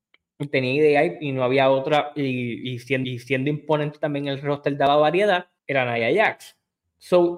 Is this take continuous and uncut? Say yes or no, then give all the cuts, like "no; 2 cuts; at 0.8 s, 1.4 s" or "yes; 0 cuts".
no; 2 cuts; at 3.0 s, 5.6 s